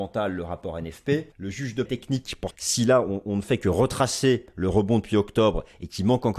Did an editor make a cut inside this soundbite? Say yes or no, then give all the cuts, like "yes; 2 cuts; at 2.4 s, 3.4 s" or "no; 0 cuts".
yes; 3 cuts; at 1.3 s, 1.9 s, 2.5 s